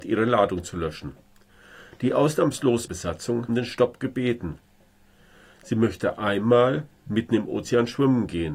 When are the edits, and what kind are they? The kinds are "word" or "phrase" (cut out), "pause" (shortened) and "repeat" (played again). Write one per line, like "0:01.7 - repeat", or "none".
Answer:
0:02.9 - phrase
0:03.5 - phrase